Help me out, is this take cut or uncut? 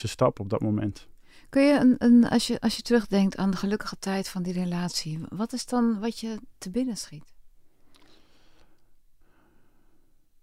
uncut